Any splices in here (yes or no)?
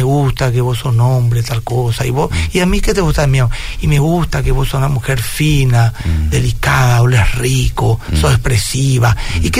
no